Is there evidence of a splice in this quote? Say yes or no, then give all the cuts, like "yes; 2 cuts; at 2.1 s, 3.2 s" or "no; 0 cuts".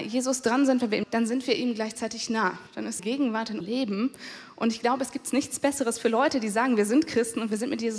yes; 4 cuts; at 1.0 s, 2.7 s, 3.0 s, 3.6 s